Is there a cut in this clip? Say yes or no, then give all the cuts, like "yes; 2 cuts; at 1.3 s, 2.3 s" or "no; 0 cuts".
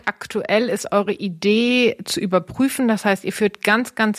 no; 0 cuts